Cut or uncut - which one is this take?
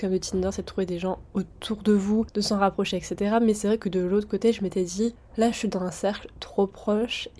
uncut